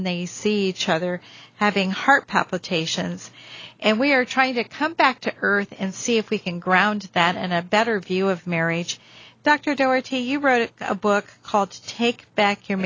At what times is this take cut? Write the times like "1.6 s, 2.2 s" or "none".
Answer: none